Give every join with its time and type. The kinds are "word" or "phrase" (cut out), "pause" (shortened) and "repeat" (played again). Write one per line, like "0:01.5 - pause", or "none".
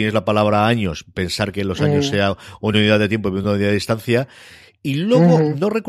none